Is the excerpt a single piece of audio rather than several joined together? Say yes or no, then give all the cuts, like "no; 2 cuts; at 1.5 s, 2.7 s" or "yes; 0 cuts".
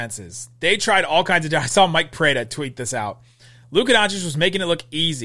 yes; 0 cuts